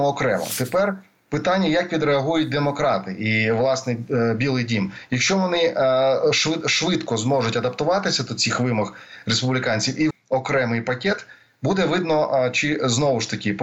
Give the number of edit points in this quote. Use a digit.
1